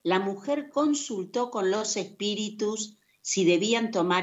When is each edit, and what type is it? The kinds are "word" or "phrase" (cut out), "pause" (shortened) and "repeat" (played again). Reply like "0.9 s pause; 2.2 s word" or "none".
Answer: none